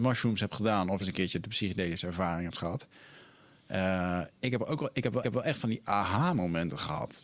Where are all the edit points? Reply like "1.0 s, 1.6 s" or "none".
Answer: 1.0 s, 5.2 s